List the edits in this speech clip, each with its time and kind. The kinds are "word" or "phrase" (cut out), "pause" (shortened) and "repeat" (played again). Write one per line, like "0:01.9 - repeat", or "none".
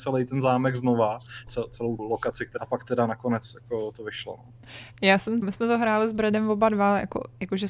0:01.5 - word
0:02.0 - word
0:02.6 - phrase
0:05.4 - word